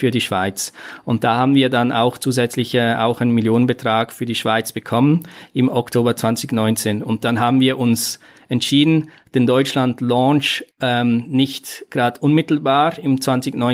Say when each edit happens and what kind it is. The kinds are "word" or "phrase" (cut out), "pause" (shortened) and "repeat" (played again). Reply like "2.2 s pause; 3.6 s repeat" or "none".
10.7 s pause